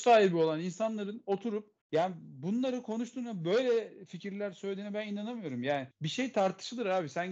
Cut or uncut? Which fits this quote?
cut